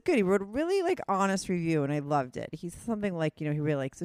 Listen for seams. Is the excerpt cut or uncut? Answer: uncut